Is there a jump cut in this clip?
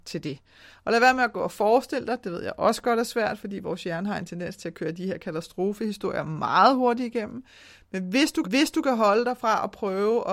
yes; 1 cut; at 8.4 s

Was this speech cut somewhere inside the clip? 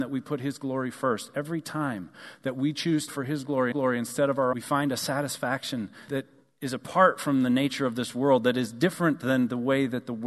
yes; 4 cuts; at 3.1 s, 3.7 s, 4.5 s, 6.1 s

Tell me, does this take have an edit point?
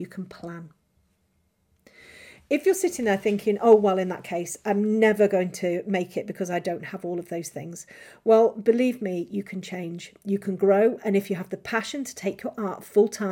no; 0 cuts

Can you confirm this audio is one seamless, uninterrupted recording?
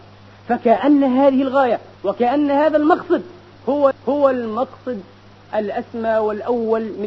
no; 2 cuts; at 2.0 s, 3.9 s

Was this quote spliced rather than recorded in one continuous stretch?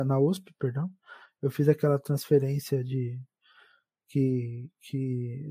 no; 0 cuts

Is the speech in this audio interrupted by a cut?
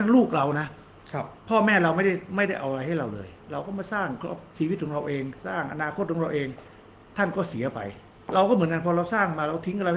yes; 1 cut; at 1.4 s

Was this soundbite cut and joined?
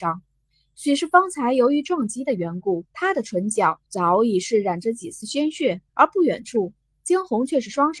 yes; 3 cuts; at 2.9 s, 3.9 s, 5.9 s

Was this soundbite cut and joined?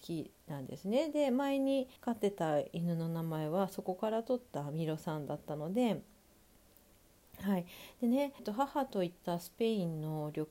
yes; 2 cuts; at 2.0 s, 8.4 s

